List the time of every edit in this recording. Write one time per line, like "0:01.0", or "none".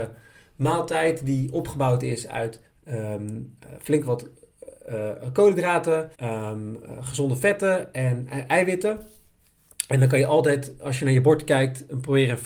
0:02.7
0:06.1